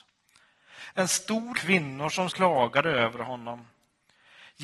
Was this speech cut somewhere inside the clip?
yes; 2 cuts; at 1.5 s, 2.3 s

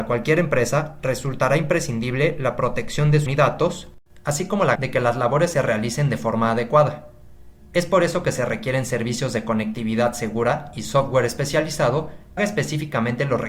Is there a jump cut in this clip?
yes; 3 cuts; at 3.3 s, 4.8 s, 12.4 s

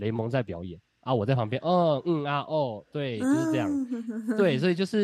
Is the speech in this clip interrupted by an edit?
no; 0 cuts

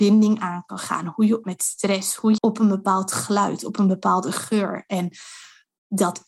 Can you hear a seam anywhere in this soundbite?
yes; 2 cuts; at 1.4 s, 2.4 s

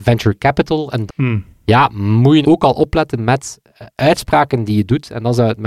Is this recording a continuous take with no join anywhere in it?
no; 2 cuts; at 1.1 s, 2.4 s

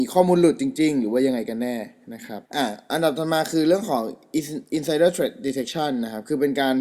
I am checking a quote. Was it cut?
yes; 1 cut; at 2.5 s

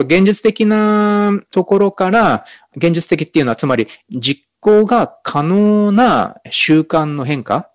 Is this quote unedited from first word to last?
yes; 0 cuts

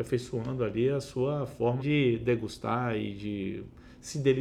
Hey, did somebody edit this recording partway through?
yes; 1 cut; at 1.8 s

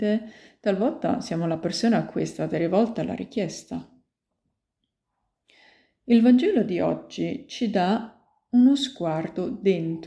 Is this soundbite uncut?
yes; 0 cuts

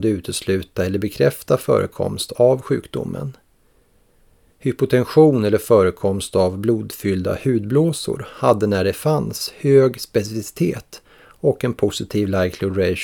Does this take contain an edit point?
no; 0 cuts

